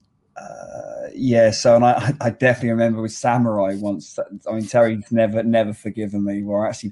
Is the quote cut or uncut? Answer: uncut